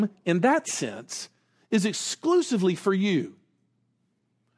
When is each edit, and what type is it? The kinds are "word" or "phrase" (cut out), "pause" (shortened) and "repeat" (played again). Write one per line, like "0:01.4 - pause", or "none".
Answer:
none

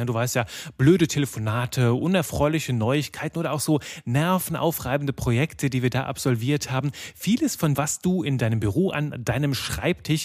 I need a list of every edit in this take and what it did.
0:07.7 - word

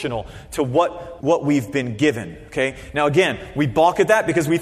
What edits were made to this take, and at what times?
0:01.2 - word

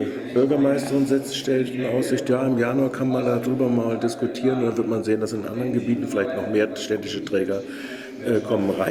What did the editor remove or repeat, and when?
none

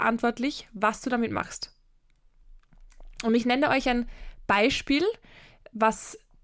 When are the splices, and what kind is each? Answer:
none

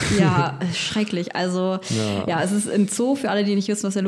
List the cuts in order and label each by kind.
none

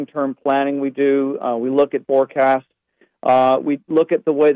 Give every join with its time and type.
0:02.0 - word

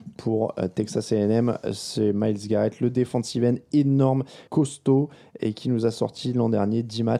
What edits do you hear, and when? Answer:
0:04.5 - pause

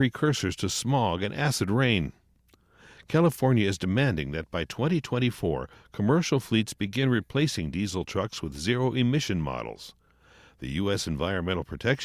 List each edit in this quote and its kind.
none

